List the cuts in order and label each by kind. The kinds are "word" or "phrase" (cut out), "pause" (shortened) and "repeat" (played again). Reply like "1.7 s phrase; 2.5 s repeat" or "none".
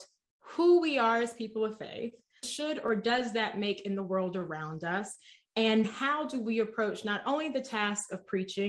2.4 s phrase; 5.8 s word